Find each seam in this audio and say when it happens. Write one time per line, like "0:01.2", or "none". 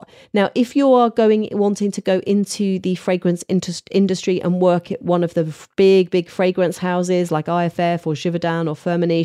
none

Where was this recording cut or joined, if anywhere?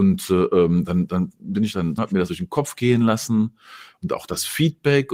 0:02.0
0:02.3

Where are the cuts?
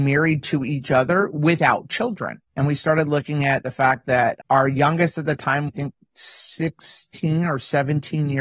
0:02.5
0:05.7

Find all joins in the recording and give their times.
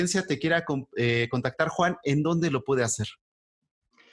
none

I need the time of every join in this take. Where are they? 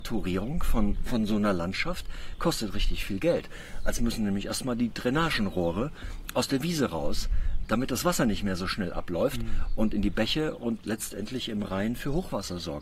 0:04.0
0:07.6
0:10.8

